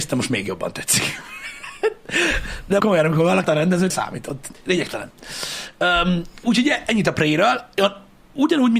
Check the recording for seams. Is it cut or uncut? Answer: cut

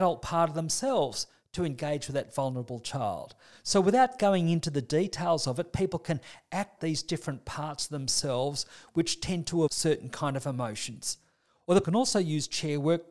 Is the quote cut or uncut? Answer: cut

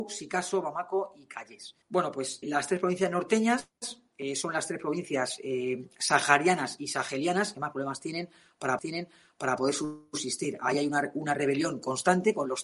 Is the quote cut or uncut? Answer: cut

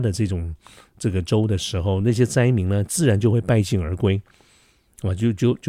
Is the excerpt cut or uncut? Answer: uncut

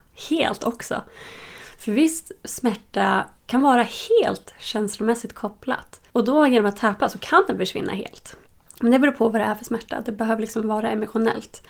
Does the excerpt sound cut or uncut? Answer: cut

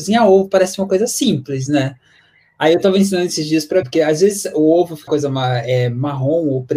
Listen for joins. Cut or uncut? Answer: cut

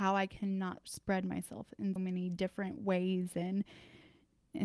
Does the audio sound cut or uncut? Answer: cut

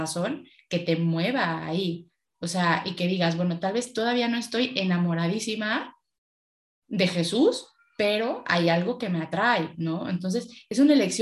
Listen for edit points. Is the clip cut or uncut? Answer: uncut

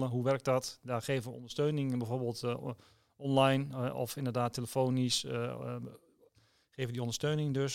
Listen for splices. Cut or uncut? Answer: uncut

